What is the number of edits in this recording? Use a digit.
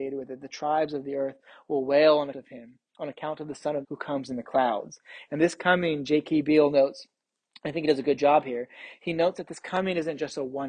2